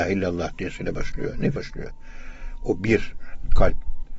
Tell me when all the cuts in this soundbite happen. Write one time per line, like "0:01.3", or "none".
0:01.6